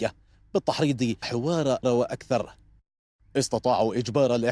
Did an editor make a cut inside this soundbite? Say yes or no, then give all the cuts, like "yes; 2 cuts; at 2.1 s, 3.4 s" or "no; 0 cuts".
yes; 2 cuts; at 1.2 s, 1.8 s